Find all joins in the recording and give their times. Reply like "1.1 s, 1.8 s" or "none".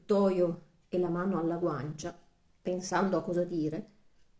none